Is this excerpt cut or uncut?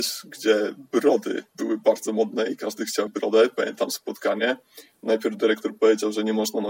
cut